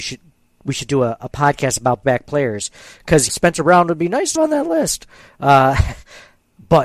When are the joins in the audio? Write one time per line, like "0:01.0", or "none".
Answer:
0:01.2
0:02.0
0:03.3
0:04.4